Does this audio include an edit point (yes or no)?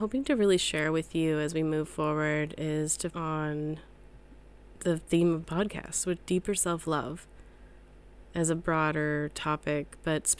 yes